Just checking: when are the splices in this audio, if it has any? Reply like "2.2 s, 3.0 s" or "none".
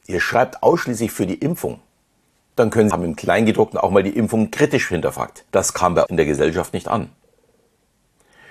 2.9 s, 5.5 s, 6.1 s